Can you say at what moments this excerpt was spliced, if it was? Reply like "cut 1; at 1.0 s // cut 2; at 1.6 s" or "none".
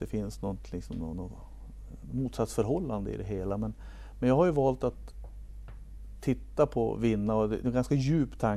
cut 1; at 7.6 s